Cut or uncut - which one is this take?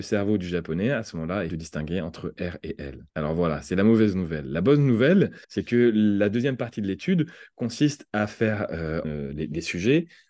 cut